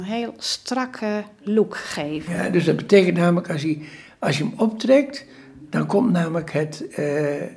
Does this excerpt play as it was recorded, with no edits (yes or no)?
yes